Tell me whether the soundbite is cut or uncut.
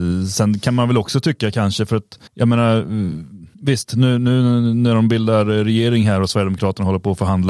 cut